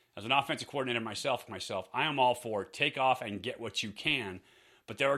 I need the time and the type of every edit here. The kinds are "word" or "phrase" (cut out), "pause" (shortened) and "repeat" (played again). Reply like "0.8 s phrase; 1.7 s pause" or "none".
1.5 s word